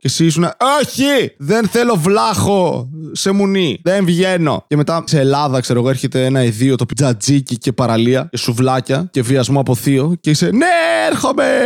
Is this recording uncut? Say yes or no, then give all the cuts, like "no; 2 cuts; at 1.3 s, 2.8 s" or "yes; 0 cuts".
no; 2 cuts; at 5.1 s, 6.9 s